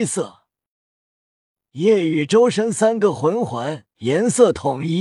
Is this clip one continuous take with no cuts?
no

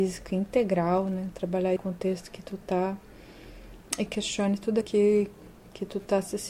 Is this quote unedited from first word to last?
no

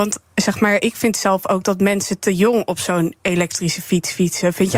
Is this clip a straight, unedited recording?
yes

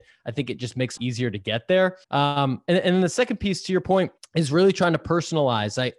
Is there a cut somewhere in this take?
yes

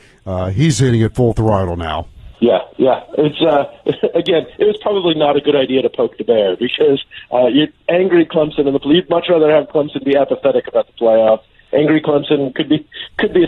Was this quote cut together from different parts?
yes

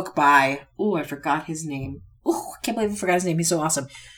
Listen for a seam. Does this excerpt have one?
no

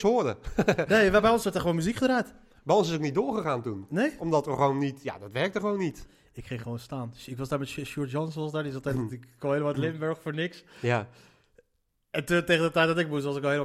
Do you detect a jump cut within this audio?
no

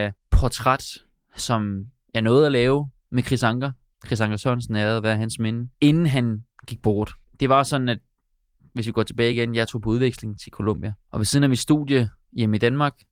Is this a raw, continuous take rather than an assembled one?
yes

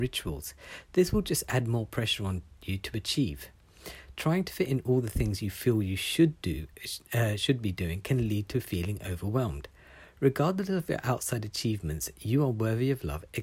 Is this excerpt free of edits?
yes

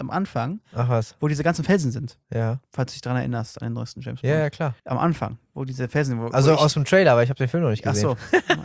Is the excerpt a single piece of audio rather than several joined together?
no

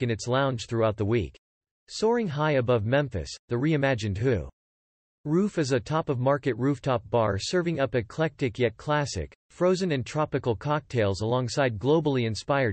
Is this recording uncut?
yes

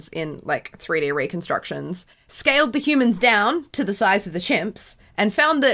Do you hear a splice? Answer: yes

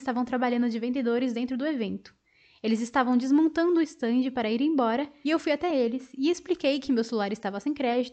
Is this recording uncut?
yes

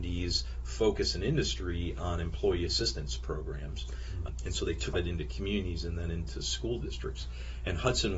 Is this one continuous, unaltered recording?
no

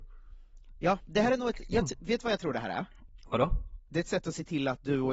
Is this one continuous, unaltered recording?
yes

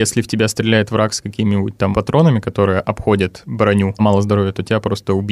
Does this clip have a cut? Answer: yes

